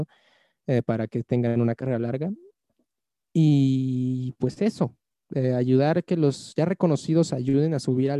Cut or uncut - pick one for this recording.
uncut